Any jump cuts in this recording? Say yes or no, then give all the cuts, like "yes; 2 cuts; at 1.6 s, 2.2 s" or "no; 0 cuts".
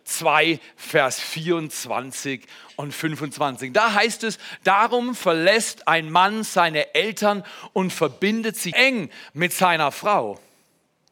yes; 1 cut; at 8.7 s